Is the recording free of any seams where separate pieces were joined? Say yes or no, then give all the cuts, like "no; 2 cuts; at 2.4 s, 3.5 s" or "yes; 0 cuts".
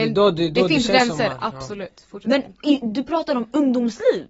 yes; 0 cuts